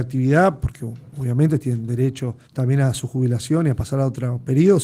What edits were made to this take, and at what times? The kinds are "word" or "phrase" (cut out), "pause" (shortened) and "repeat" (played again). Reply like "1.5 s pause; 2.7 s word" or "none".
2.5 s pause